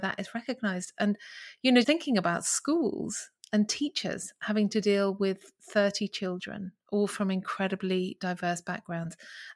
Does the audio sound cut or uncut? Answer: cut